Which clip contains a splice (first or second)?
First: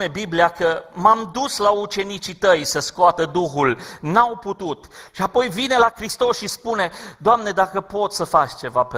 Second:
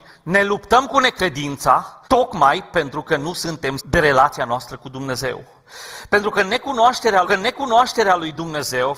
second